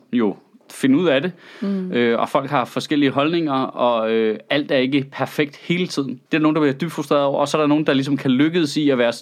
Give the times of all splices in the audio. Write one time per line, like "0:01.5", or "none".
0:06.3